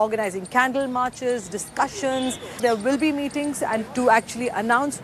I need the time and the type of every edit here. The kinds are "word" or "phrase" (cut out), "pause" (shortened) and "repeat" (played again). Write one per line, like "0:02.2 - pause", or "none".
0:03.9 - word